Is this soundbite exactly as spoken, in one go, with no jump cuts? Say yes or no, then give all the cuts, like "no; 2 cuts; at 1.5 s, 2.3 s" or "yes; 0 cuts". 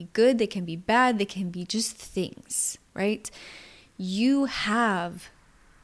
yes; 0 cuts